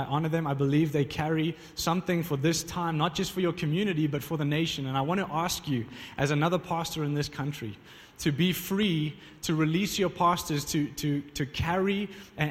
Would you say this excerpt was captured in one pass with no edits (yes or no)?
yes